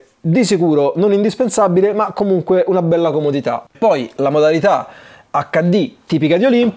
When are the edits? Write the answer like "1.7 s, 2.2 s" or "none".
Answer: 3.7 s